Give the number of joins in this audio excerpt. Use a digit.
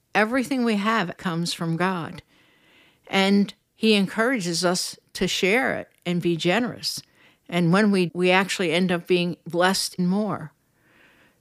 3